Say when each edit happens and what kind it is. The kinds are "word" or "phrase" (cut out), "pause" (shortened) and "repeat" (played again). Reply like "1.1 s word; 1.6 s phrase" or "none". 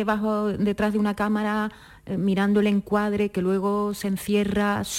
none